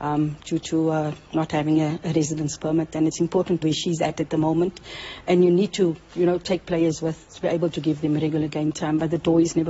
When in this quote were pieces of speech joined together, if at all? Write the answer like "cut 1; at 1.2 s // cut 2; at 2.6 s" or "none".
cut 1; at 3.6 s